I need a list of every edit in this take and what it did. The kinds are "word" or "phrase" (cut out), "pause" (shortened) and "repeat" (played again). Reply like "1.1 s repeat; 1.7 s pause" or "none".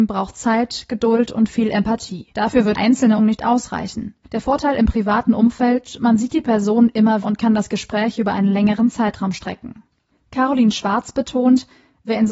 2.3 s pause; 2.7 s word; 3.2 s word; 4.2 s pause; 7.2 s word; 10.2 s pause